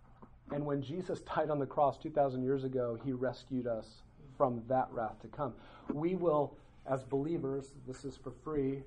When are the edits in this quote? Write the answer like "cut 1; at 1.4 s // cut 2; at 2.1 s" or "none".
none